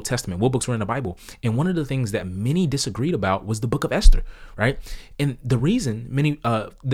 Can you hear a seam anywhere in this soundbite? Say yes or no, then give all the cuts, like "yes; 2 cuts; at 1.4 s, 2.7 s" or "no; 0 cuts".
no; 0 cuts